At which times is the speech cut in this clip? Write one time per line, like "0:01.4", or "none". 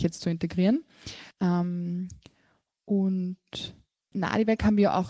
0:01.3
0:04.1

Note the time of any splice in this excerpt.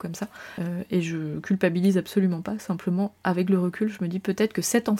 none

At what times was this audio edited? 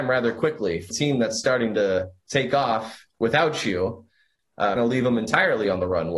0:00.9
0:03.1
0:04.8

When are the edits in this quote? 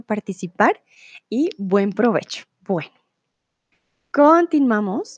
0:02.5

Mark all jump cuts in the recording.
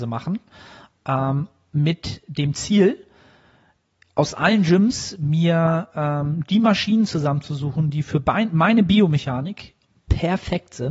none

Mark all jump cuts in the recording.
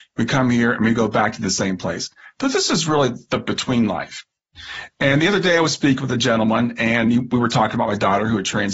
none

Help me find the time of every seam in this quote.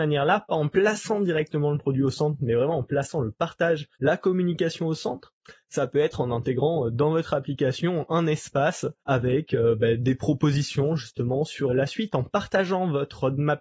0:03.9
0:09.0
0:11.7

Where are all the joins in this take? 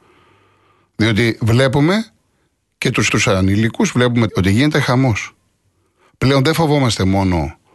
0:03.1
0:04.3

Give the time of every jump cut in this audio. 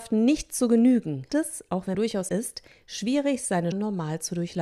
0:01.3
0:01.9
0:02.3
0:03.7

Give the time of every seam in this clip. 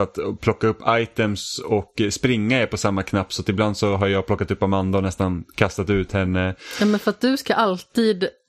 none

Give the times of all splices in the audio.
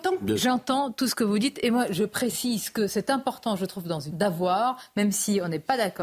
0:04.1

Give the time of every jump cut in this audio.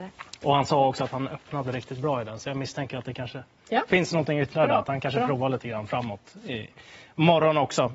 none

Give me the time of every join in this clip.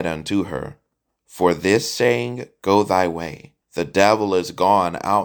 0:03.6

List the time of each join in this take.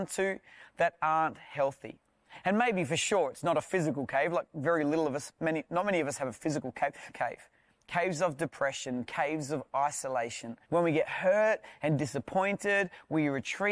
0:07.1
0:10.6

